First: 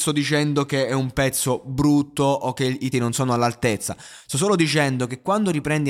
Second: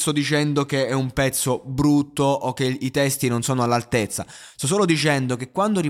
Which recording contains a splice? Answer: first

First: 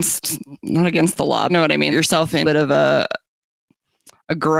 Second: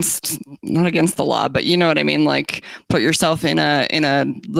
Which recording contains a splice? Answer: first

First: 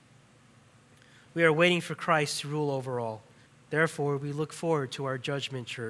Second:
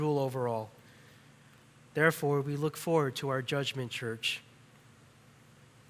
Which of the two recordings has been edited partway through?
first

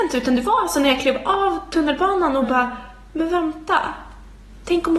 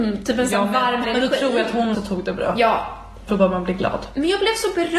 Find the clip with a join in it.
second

